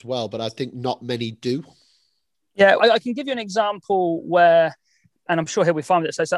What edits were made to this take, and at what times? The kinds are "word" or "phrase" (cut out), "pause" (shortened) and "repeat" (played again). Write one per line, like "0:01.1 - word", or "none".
0:02.8 - word